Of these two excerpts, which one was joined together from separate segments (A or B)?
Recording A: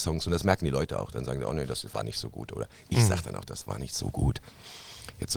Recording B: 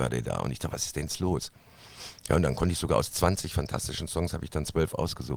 B